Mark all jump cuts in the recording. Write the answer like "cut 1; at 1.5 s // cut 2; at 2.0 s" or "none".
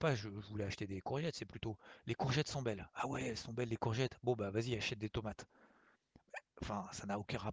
none